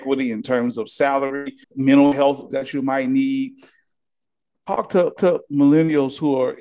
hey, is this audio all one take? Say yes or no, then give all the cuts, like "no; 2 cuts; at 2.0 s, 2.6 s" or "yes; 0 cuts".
no; 3 cuts; at 1.6 s, 2.5 s, 5.2 s